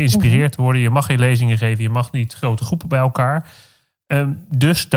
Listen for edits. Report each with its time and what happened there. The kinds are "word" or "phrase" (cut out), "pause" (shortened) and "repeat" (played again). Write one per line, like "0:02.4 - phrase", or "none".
none

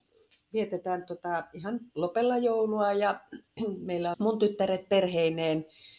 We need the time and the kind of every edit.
0:01.9 - word
0:04.1 - phrase

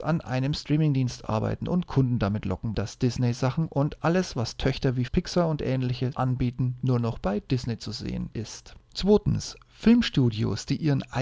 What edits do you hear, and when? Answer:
0:02.7 - word
0:05.1 - word
0:06.1 - word

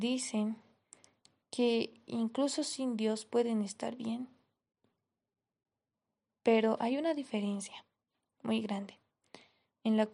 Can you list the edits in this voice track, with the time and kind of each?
none

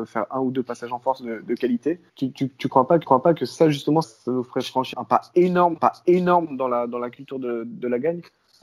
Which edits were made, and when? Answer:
0:02.1 - pause
0:03.0 - repeat
0:04.0 - word
0:04.9 - word
0:05.8 - repeat

